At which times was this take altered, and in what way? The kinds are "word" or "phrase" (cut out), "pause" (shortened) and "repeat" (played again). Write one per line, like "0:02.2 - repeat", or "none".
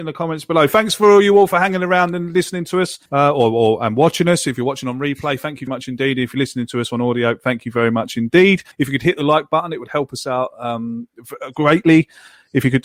0:03.1 - pause
0:05.7 - word
0:08.7 - pause